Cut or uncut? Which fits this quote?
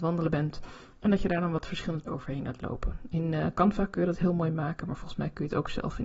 cut